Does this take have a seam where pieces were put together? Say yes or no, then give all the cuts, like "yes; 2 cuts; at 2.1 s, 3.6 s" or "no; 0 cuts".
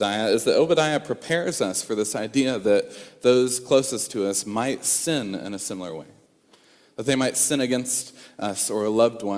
no; 0 cuts